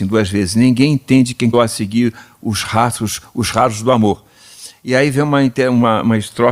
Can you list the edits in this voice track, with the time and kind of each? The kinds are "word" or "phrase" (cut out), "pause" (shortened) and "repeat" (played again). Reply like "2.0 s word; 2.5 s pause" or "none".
1.5 s word; 3.5 s word